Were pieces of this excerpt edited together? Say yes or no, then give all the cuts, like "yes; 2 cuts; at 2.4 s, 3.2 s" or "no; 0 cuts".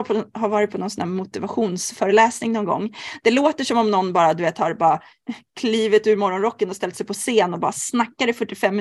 no; 0 cuts